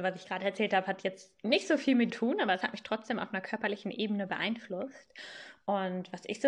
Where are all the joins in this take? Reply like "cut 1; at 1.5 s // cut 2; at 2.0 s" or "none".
cut 1; at 2.1 s